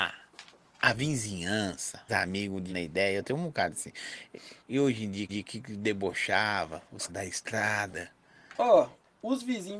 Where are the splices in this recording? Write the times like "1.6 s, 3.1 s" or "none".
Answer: 2.1 s, 2.7 s, 4.6 s, 5.3 s, 7.1 s